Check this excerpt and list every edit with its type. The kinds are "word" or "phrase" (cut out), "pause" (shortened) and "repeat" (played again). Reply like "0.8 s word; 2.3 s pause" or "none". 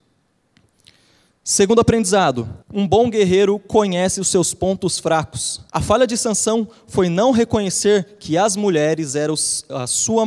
2.6 s pause; 5.7 s pause